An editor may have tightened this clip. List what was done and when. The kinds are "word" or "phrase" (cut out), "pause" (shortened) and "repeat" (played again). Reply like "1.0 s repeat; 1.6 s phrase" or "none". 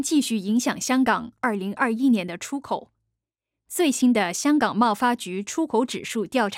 none